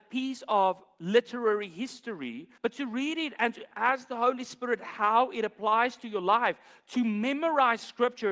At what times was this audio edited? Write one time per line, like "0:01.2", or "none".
0:02.6